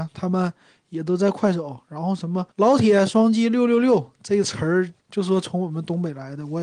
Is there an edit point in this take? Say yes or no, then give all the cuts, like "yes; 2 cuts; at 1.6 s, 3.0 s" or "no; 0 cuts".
yes; 2 cuts; at 2.5 s, 5.0 s